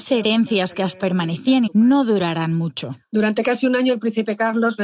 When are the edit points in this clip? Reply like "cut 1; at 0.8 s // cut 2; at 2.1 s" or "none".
cut 1; at 1.0 s // cut 2; at 1.7 s